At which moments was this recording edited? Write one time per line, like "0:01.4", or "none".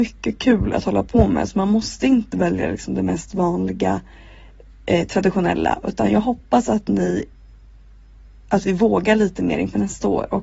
none